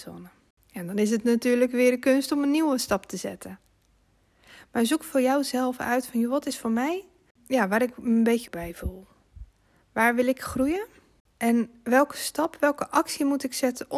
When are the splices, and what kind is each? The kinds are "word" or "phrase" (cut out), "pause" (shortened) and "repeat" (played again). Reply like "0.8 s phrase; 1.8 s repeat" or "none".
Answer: 8.5 s word